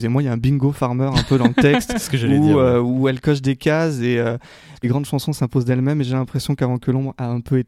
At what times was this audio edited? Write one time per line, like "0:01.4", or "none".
none